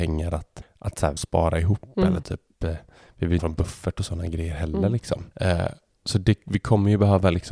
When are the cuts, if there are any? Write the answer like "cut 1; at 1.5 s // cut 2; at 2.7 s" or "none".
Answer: cut 1; at 1.2 s // cut 2; at 2.2 s // cut 3; at 3.4 s // cut 4; at 5.3 s